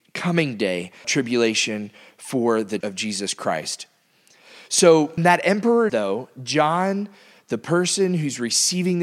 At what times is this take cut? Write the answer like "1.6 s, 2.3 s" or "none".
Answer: 1.0 s, 2.8 s, 5.2 s, 5.9 s

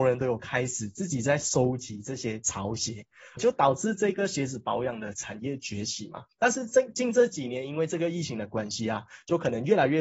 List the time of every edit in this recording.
3.4 s, 6.3 s

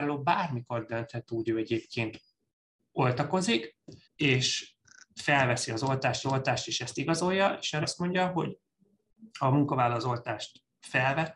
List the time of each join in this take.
1.5 s, 4.0 s, 6.2 s, 7.8 s, 9.3 s

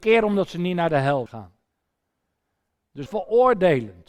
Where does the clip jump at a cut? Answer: 1.3 s, 3.1 s

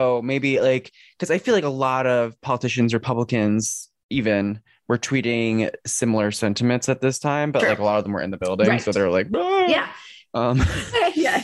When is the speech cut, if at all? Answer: none

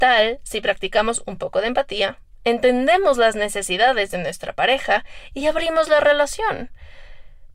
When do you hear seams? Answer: none

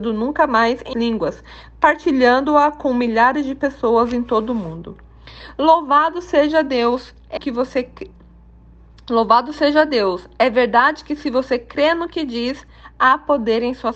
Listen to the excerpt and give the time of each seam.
0.9 s, 7.4 s

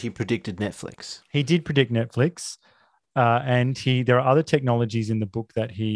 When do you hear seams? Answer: none

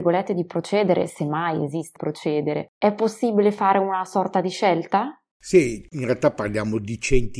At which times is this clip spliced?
2.0 s

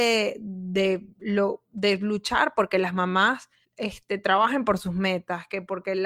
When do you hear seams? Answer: 3.6 s

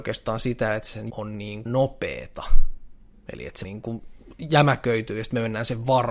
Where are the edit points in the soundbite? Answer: 1.1 s, 1.7 s, 3.6 s

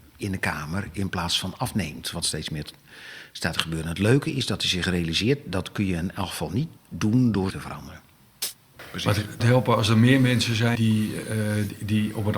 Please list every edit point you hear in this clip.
2.2 s, 6.8 s, 7.5 s, 9.4 s, 10.7 s

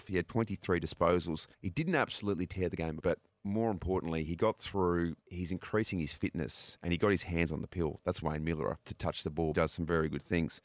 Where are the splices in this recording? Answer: 1.5 s, 3.0 s, 5.2 s, 8.2 s, 8.9 s, 9.5 s

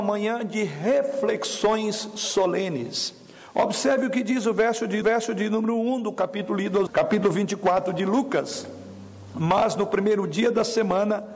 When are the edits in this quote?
5.0 s, 6.9 s

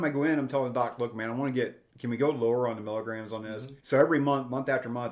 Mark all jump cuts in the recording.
1.9 s, 3.8 s

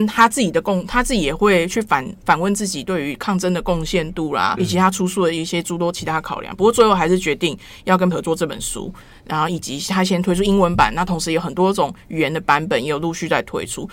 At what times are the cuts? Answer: 4.6 s, 8.1 s

